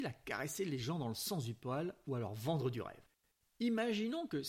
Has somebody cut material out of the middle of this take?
no; 0 cuts

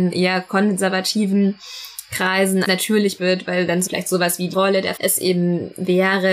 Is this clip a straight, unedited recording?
no; 5 cuts; at 2.6 s, 3.2 s, 3.9 s, 4.5 s, 5.0 s

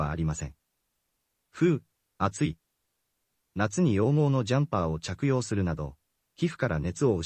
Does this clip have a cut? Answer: no; 0 cuts

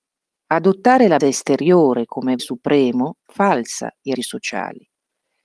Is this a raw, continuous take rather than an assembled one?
no; 4 cuts; at 1.2 s, 2.4 s, 3.2 s, 4.2 s

